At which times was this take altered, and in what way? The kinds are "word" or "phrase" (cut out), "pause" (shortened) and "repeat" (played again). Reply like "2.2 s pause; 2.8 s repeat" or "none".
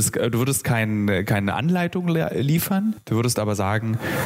none